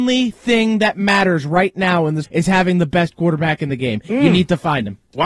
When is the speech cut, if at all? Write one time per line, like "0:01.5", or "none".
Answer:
0:02.2

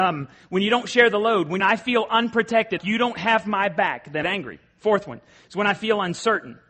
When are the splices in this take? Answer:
0:01.6
0:02.8
0:04.2

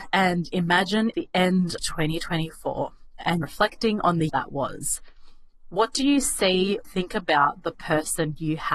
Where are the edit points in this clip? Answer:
0:01.1
0:01.8
0:03.4
0:04.3
0:06.8

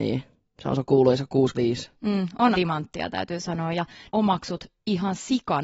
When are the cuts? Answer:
0:01.5
0:02.5
0:04.1

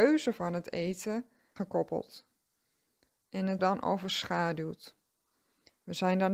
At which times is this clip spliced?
0:01.6
0:03.6

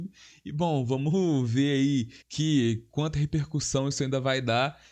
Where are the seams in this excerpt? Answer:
0:02.2

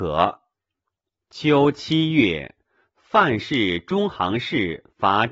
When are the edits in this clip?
none

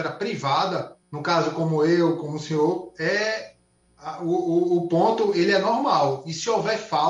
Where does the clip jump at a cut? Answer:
0:01.0

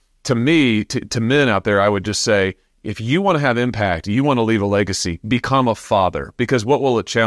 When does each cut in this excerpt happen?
none

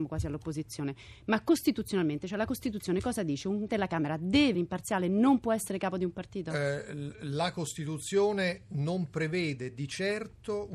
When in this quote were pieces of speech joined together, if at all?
0:03.7
0:04.5

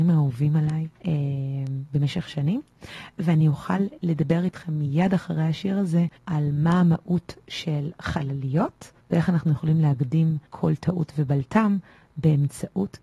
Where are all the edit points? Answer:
0:01.0
0:06.2
0:09.0
0:10.5

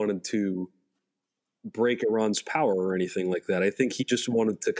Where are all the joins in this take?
none

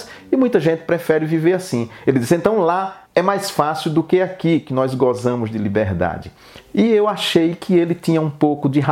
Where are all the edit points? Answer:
0:03.1

